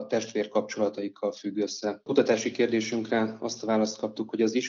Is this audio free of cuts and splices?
yes; 0 cuts

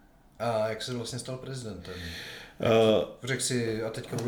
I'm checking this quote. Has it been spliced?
no; 0 cuts

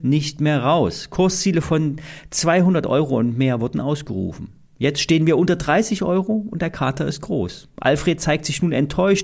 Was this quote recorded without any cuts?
yes; 0 cuts

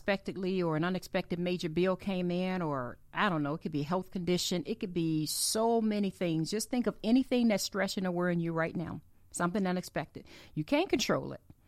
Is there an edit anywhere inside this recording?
no; 0 cuts

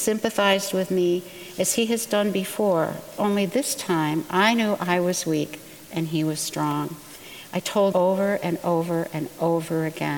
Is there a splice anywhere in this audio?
yes; 1 cut; at 7.9 s

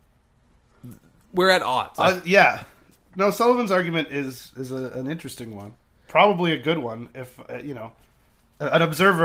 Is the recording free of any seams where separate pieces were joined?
yes; 0 cuts

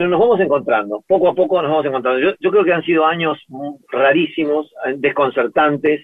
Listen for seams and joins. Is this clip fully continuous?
no; 1 cut; at 3.8 s

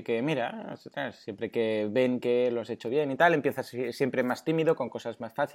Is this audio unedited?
yes; 0 cuts

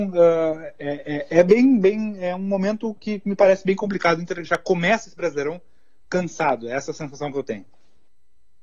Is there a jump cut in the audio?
no; 0 cuts

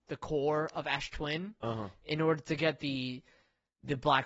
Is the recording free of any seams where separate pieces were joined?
yes; 0 cuts

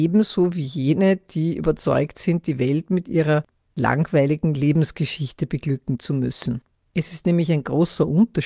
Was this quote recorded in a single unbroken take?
yes; 0 cuts

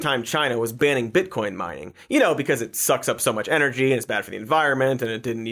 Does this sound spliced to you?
no; 0 cuts

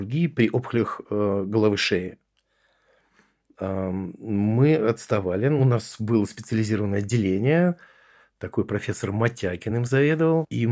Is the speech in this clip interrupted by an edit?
no; 0 cuts

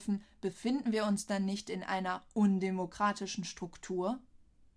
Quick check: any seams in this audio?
no; 0 cuts

